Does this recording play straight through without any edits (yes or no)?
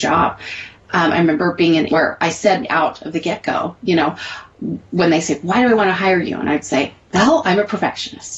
no